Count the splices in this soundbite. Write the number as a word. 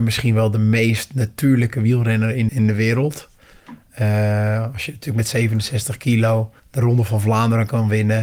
two